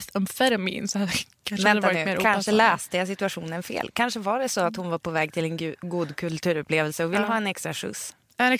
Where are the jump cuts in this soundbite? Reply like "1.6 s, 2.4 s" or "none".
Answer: none